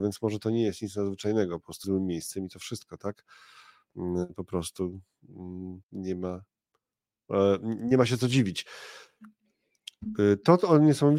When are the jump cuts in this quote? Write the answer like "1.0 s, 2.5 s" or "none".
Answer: 1.8 s, 5.8 s

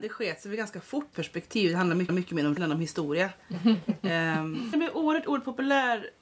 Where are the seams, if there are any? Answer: 1.1 s, 2.1 s, 2.6 s, 4.7 s

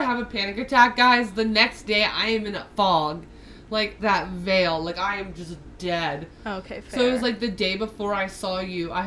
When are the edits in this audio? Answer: 2.7 s, 4.0 s

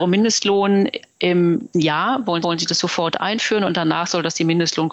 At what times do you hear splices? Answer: 1.7 s, 2.4 s

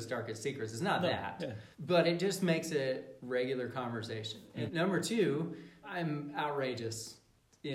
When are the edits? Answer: 1.7 s, 4.7 s, 5.8 s

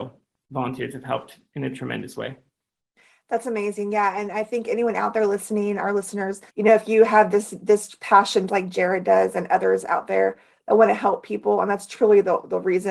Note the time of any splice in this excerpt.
6.5 s, 8.5 s

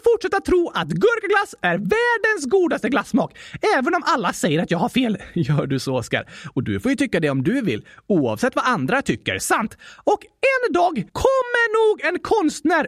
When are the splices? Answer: 11.1 s

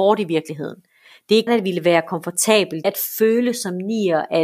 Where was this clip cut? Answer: 1.5 s, 2.8 s

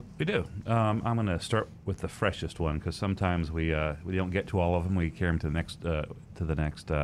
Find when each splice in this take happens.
none

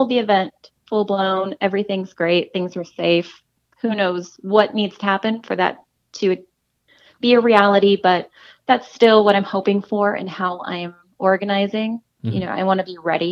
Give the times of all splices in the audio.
none

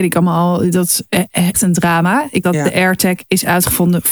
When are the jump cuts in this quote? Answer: 1.5 s, 2.4 s

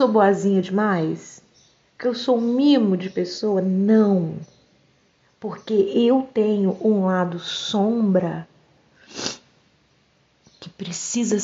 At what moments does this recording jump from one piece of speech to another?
none

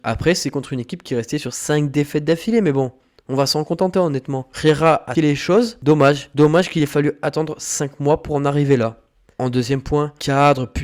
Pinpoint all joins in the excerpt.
5.2 s

